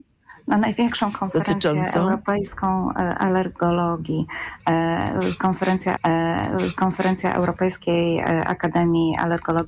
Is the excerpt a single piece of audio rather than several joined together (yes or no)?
no